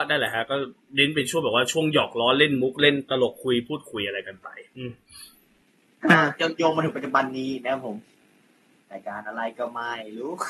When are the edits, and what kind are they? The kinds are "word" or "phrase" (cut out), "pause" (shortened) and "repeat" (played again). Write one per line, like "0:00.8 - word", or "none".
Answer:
none